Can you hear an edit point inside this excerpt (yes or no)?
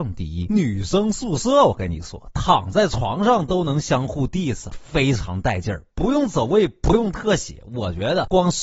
yes